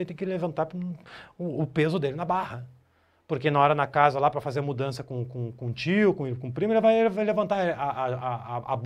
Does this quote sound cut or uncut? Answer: uncut